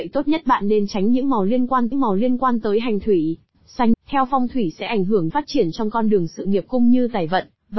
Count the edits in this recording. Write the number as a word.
four